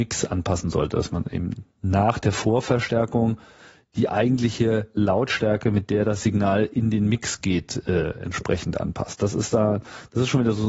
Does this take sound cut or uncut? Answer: uncut